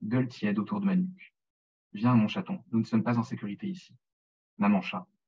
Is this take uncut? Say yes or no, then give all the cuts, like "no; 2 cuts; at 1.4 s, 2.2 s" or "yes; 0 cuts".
yes; 0 cuts